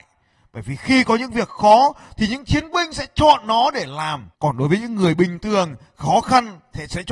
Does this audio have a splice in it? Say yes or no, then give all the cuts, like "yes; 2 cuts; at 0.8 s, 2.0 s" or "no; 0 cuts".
yes; 1 cut; at 4.3 s